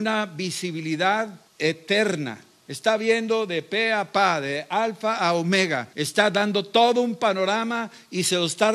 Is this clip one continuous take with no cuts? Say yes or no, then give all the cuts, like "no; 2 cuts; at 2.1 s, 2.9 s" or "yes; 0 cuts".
no; 2 cuts; at 1.5 s, 5.9 s